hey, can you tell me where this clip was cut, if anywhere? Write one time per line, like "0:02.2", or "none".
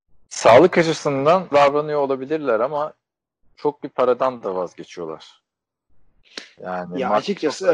0:01.5
0:03.8